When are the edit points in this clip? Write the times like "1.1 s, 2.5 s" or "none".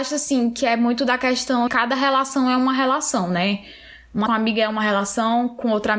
1.7 s, 4.3 s